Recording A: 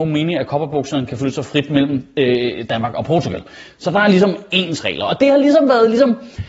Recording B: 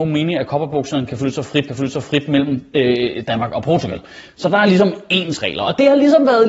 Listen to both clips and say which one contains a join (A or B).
B